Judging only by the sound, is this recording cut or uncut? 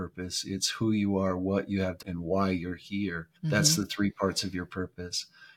cut